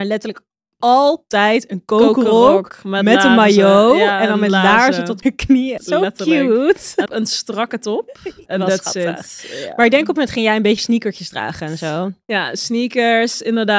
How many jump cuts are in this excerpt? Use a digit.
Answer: 6